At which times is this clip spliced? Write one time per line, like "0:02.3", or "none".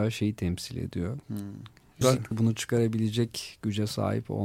0:01.2
0:02.0
0:02.3